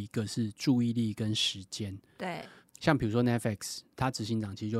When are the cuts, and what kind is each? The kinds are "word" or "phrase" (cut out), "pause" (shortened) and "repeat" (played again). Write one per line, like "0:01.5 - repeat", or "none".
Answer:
none